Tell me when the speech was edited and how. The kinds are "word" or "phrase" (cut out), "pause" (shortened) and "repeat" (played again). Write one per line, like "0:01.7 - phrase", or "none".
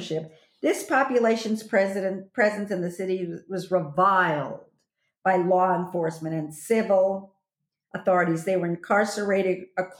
none